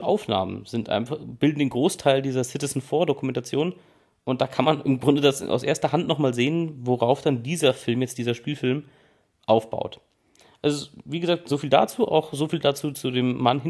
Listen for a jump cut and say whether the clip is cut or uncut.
uncut